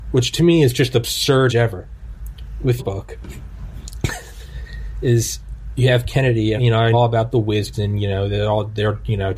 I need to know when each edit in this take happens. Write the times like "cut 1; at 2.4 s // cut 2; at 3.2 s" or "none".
cut 1; at 0.9 s // cut 2; at 1.5 s // cut 3; at 2.8 s // cut 4; at 6.6 s // cut 5; at 6.9 s // cut 6; at 7.7 s